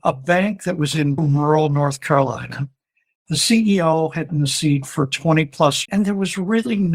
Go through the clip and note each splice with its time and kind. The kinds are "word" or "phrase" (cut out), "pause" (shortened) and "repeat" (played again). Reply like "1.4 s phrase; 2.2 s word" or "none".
1.2 s word; 4.3 s word; 5.8 s word